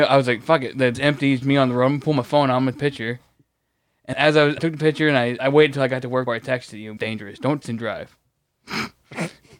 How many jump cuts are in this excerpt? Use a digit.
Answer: 9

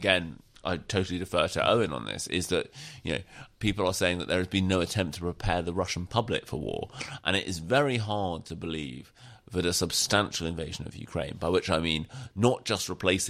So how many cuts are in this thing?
0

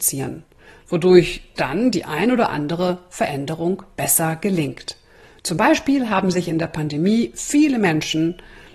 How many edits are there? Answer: 0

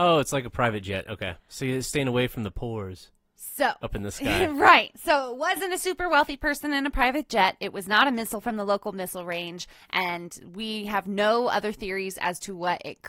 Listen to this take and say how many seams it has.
1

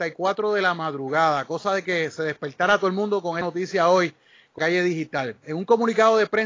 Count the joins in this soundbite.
2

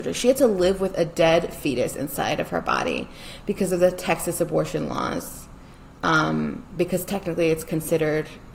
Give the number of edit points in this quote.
0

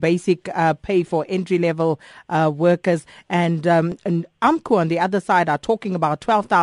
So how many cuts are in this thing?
0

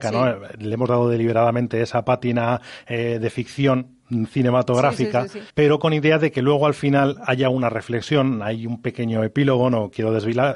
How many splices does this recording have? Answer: 1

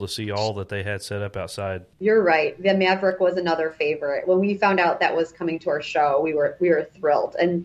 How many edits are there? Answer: 1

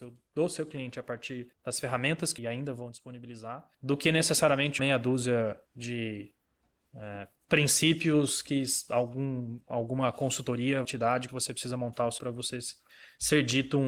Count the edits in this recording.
8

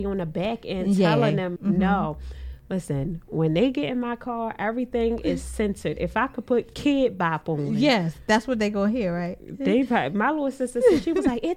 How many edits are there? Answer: 1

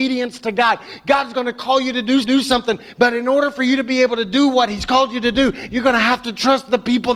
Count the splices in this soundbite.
1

